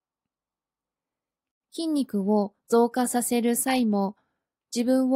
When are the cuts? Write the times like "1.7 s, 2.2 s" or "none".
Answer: none